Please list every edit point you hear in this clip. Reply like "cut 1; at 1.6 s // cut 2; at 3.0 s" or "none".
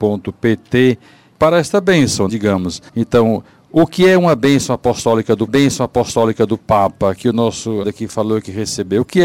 cut 1; at 2.3 s // cut 2; at 2.9 s // cut 3; at 5.5 s // cut 4; at 7.8 s